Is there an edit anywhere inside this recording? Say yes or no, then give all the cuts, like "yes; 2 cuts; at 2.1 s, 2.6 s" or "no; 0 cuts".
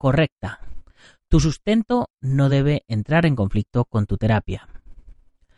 no; 0 cuts